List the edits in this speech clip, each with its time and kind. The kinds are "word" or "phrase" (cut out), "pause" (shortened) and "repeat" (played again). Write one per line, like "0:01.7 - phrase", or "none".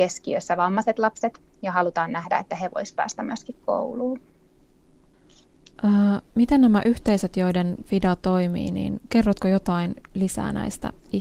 0:07.8 - word